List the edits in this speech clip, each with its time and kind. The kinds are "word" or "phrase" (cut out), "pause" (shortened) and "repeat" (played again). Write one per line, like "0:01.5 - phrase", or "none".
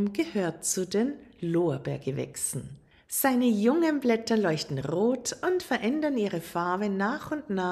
none